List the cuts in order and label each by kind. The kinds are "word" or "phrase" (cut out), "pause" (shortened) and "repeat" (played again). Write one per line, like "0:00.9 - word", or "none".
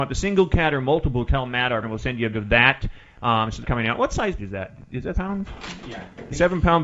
0:01.3 - word
0:01.8 - word
0:02.3 - word
0:03.6 - word
0:04.4 - word
0:05.1 - word

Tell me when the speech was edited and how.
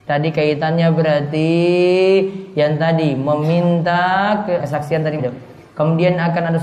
0:04.6 - word
0:05.2 - word

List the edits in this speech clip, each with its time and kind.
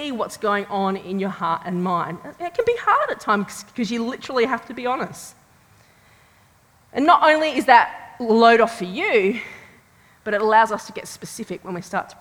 none

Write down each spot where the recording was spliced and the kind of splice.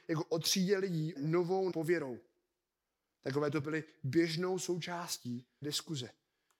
0:01.2 - word
0:01.7 - word
0:03.6 - word
0:05.6 - word

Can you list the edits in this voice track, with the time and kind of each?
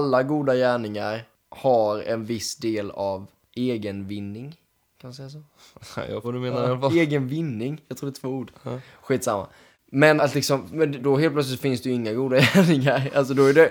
0:06.2 - word
0:10.2 - word
0:11.0 - word

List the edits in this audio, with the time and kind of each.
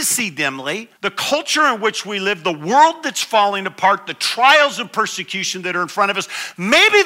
0:01.0 - pause

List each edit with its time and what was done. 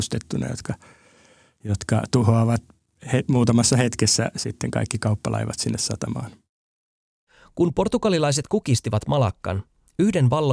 none

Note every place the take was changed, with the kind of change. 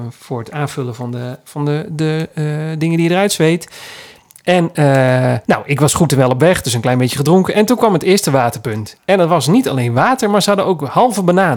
0:05.4 - pause

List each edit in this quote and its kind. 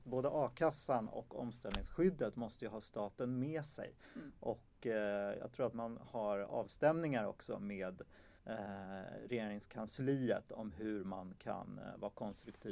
0:08.4 - pause

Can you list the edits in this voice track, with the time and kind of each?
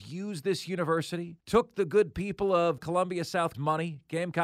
0:01.4 - pause
0:02.8 - word
0:03.5 - word

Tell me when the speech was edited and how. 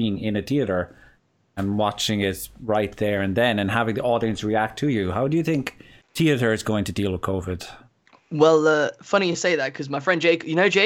0:06.0 - pause

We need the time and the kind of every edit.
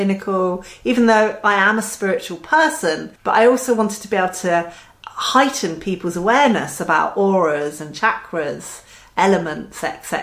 0:03.2 - pause

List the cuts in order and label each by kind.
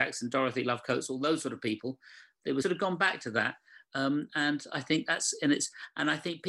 0:02.6 - phrase

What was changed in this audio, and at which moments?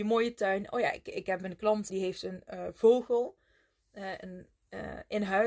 0:01.9 - word

